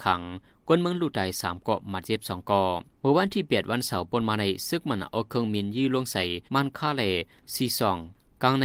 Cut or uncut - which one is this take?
cut